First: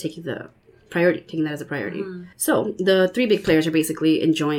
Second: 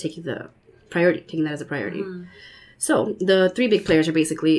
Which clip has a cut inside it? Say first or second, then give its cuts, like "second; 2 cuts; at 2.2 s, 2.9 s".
first; 1 cut; at 2.3 s